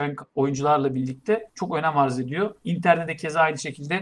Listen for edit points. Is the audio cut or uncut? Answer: uncut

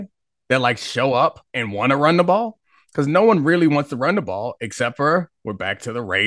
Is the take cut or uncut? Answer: cut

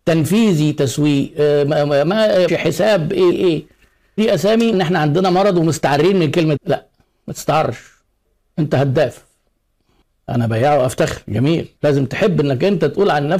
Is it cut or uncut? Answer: cut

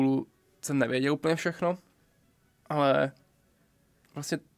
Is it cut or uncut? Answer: cut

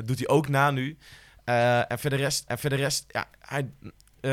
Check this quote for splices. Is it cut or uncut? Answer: cut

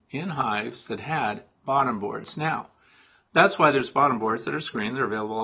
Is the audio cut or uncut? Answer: cut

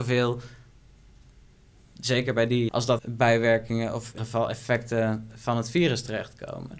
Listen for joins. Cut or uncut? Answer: cut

